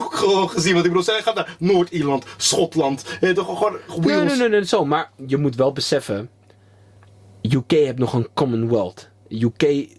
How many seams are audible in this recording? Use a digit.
0